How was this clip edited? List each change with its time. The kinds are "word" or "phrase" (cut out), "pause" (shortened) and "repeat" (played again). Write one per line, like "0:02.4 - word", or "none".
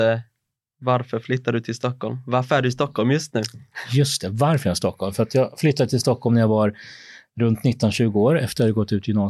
none